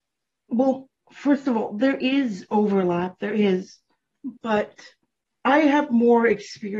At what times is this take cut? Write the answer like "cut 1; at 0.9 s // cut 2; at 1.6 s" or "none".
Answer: cut 1; at 4.4 s

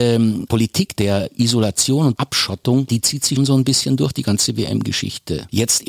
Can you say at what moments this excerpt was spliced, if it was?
cut 1; at 3.4 s

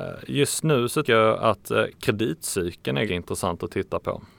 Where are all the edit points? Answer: cut 1; at 1.0 s // cut 2; at 3.1 s

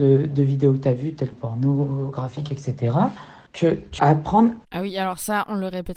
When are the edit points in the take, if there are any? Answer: cut 1; at 1.3 s // cut 2; at 3.5 s // cut 3; at 4.0 s // cut 4; at 4.6 s

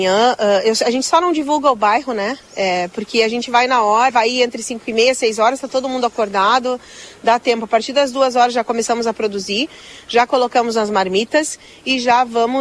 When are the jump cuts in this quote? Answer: cut 1; at 4.1 s

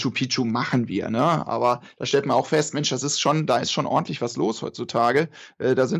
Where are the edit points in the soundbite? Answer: none

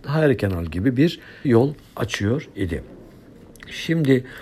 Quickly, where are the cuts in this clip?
cut 1; at 1.4 s

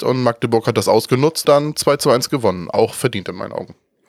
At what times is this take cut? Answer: cut 1; at 1.4 s

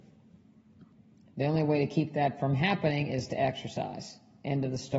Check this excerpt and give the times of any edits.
none

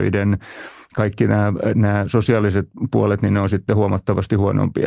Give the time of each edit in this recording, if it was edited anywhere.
none

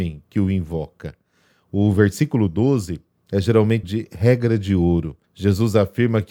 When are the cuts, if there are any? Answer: cut 1; at 3.8 s // cut 2; at 5.2 s

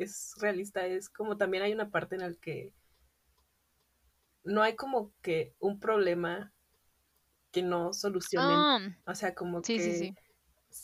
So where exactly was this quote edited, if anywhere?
cut 1; at 9.0 s

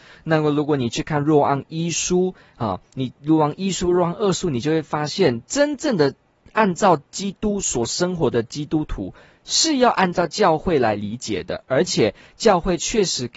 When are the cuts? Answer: none

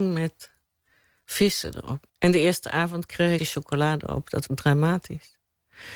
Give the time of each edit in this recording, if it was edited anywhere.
cut 1; at 2.1 s // cut 2; at 3.4 s // cut 3; at 4.5 s

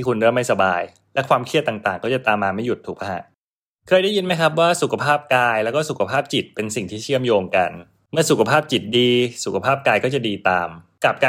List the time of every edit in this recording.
none

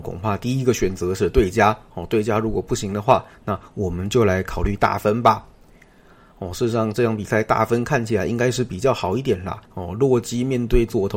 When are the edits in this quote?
cut 1; at 9.7 s

